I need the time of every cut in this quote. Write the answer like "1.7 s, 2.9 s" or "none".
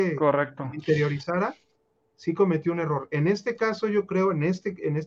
none